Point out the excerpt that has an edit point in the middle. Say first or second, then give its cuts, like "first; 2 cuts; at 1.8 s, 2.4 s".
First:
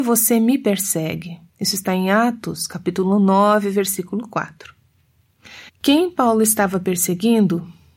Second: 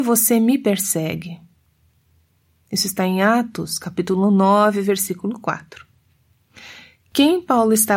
first; 2 cuts; at 1.5 s, 5.7 s